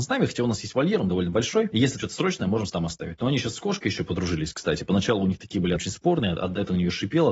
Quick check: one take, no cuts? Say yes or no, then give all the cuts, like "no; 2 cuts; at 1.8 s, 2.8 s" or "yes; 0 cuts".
no; 3 cuts; at 2.0 s, 2.7 s, 5.8 s